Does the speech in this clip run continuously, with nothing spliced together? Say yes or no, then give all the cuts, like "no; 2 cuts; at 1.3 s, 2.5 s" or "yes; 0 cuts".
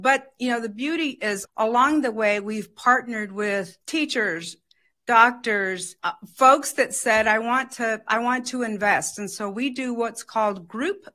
no; 3 cuts; at 1.4 s, 3.8 s, 6.0 s